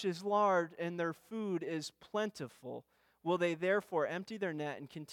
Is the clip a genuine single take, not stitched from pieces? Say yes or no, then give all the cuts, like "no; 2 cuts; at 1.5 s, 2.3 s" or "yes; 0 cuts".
yes; 0 cuts